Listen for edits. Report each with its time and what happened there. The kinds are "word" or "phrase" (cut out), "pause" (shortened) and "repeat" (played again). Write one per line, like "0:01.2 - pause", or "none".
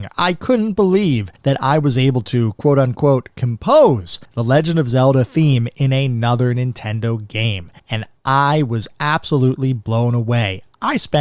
0:01.4 - pause
0:04.3 - pause
0:07.8 - pause